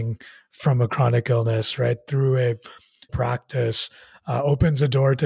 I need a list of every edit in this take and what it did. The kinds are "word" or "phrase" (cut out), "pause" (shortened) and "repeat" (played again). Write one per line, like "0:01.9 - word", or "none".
0:03.1 - word